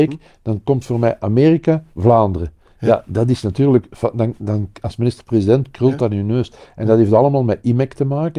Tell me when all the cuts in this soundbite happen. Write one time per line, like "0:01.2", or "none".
0:01.9